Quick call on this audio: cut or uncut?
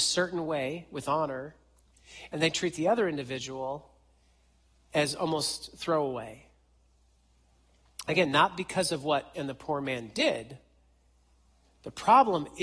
cut